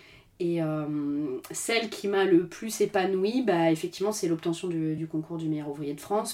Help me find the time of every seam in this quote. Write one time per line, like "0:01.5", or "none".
none